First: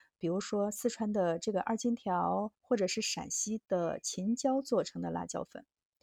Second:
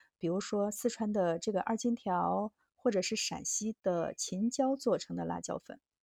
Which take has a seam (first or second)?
first